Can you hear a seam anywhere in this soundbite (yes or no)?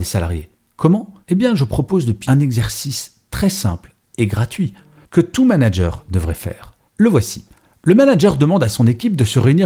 yes